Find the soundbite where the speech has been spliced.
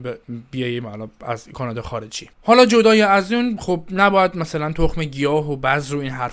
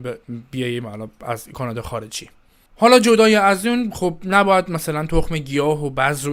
first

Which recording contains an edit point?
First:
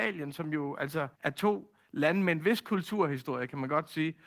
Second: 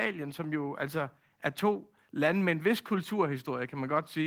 first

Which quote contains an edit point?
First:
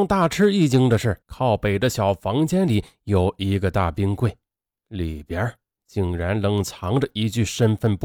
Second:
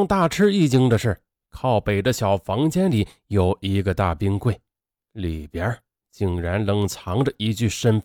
first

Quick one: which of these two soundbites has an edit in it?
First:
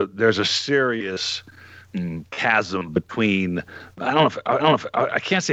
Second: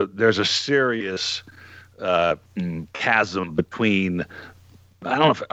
first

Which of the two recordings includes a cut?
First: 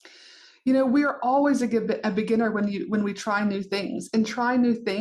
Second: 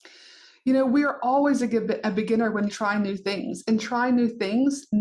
second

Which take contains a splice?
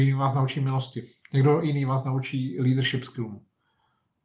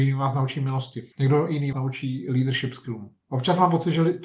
second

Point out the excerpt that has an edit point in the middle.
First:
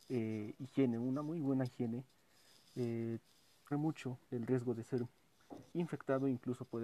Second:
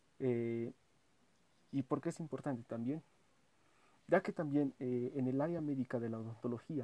first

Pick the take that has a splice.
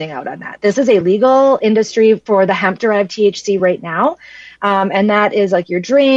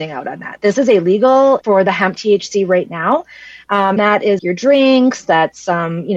second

